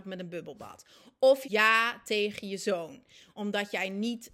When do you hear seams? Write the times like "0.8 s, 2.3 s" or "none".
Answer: 1.4 s

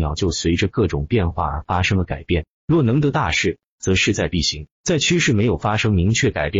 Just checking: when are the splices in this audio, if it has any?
2.5 s, 4.7 s

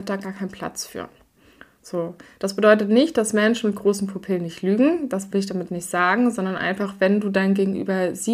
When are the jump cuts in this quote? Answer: none

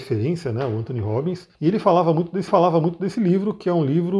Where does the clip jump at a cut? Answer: 1.5 s, 2.5 s

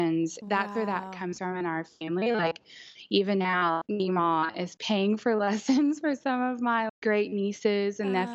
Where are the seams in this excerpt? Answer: 3.8 s, 6.9 s

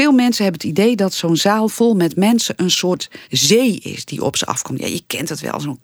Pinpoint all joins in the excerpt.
3.2 s

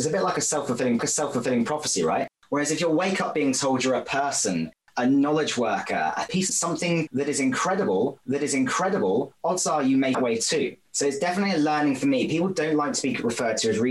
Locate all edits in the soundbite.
1.0 s, 6.5 s, 8.2 s, 10.1 s

